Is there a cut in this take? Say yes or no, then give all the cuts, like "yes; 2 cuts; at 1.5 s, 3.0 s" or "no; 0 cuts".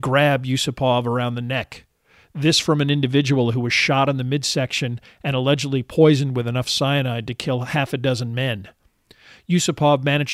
no; 0 cuts